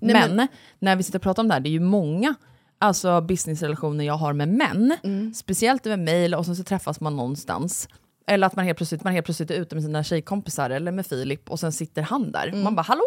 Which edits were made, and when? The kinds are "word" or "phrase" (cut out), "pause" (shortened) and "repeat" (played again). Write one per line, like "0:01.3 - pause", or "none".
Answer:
0:09.0 - repeat